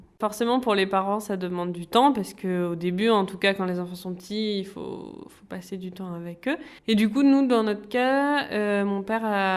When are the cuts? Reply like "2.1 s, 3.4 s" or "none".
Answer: 6.8 s